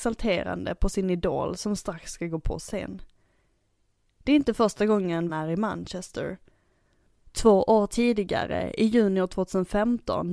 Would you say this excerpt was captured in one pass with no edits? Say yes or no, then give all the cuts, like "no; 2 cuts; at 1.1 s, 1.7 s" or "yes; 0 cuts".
no; 1 cut; at 5.3 s